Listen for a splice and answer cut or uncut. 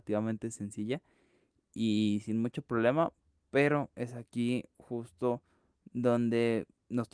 uncut